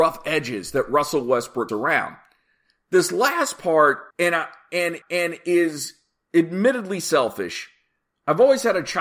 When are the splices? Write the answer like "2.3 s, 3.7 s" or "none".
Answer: 1.7 s, 4.1 s, 5.0 s